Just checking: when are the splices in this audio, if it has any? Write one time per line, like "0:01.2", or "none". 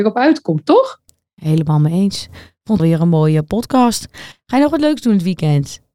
0:02.8